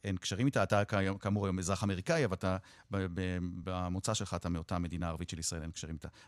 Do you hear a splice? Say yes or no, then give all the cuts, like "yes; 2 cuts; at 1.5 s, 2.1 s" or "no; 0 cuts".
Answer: no; 0 cuts